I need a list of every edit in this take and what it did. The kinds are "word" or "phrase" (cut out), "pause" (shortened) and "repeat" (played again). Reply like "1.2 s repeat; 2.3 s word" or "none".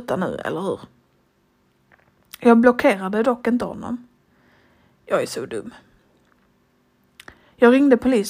none

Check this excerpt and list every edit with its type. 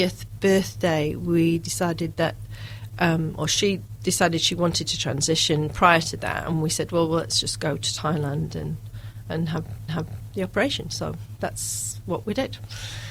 9.9 s repeat

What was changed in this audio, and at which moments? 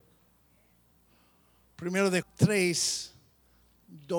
2.2 s word

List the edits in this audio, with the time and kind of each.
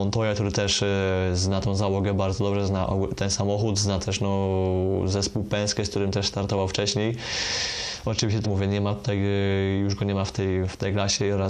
8.4 s phrase

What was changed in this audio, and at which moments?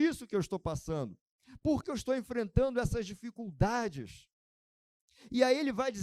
1.8 s word

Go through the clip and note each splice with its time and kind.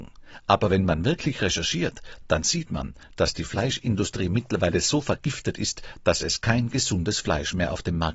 none

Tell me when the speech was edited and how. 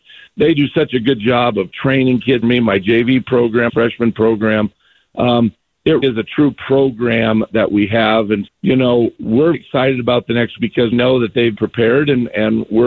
2.4 s word; 3.7 s word; 6.0 s word; 7.5 s word; 8.5 s word; 9.5 s word; 10.6 s word; 10.9 s word; 11.5 s word

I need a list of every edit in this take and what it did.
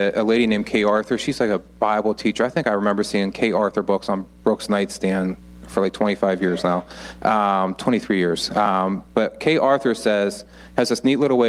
none

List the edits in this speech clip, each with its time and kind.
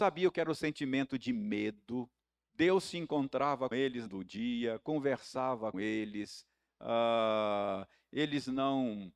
2.2 s pause; 3.7 s word; 4.1 s phrase; 5.7 s word

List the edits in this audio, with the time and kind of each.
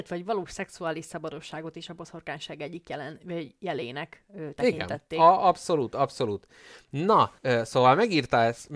7.4 s pause

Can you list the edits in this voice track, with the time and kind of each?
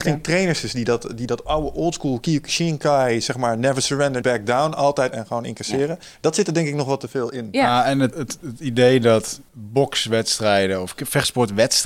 4.2 s word; 5.1 s phrase; 8.1 s word; 9.5 s pause

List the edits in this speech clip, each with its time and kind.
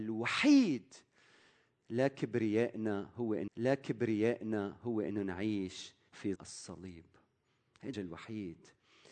3.5 s repeat; 6.4 s word; 7.9 s word

